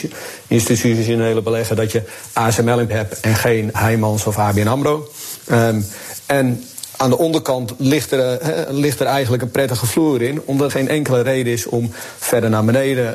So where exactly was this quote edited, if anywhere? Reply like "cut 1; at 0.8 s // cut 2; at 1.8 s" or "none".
cut 1; at 2.9 s // cut 2; at 3.7 s // cut 3; at 10.7 s

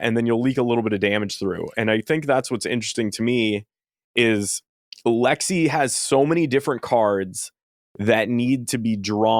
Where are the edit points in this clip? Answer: none

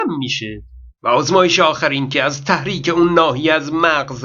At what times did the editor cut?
none

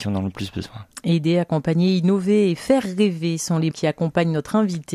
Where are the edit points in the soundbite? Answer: cut 1; at 3.7 s

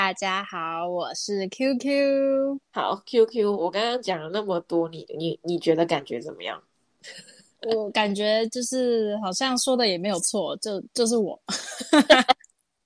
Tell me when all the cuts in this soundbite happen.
cut 1; at 2.6 s

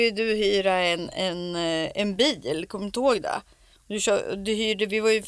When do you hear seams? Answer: none

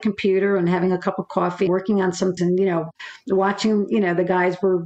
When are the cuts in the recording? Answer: cut 1; at 1.7 s // cut 2; at 2.4 s

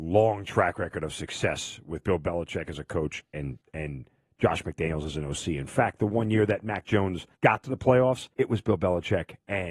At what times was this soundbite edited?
cut 1; at 3.6 s // cut 2; at 7.4 s // cut 3; at 8.3 s

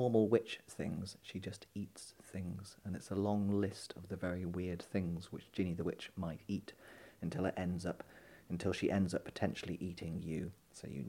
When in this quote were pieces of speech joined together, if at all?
none

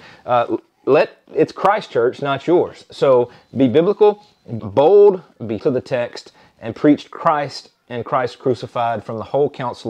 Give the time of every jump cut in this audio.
cut 1; at 4.6 s // cut 2; at 5.6 s

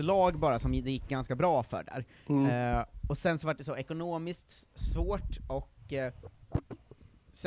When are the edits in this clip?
none

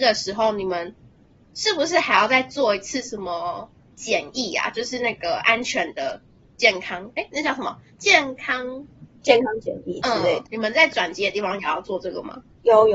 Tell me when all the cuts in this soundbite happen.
none

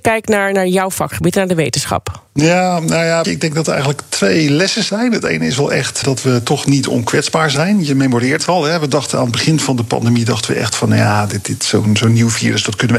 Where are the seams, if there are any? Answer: cut 1; at 2.3 s // cut 2; at 3.2 s // cut 3; at 6.0 s // cut 4; at 8.4 s

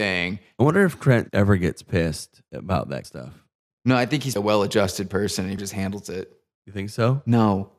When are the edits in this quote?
cut 1; at 3.0 s // cut 2; at 4.4 s // cut 3; at 5.6 s

